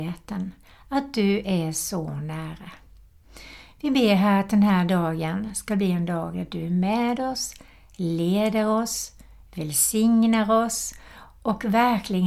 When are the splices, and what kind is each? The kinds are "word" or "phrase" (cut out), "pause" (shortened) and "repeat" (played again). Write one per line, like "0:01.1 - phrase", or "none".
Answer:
none

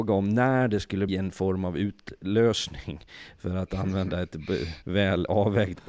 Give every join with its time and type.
0:01.1 - word
0:04.8 - pause

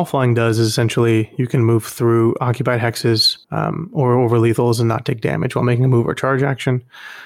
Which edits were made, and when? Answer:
0:03.4 - pause

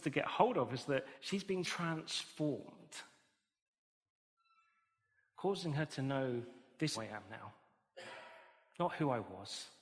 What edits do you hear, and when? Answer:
0:01.1 - pause
0:01.6 - word
0:06.9 - phrase

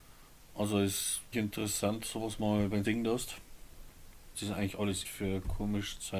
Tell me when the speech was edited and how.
0:01.3 - word
0:02.8 - phrase
0:04.3 - phrase
0:05.0 - word

